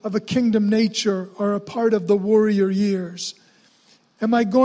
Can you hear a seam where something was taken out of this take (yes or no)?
no